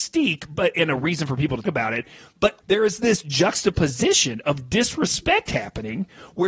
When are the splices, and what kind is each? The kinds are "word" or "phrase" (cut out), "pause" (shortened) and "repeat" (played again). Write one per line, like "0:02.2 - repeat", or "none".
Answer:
0:01.6 - word
0:02.6 - word
0:03.2 - word